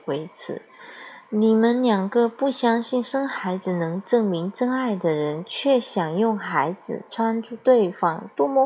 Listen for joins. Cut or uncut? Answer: uncut